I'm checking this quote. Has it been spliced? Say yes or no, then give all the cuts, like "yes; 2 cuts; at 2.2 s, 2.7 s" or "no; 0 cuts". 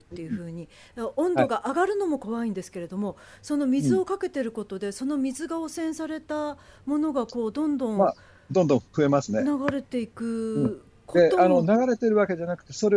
no; 0 cuts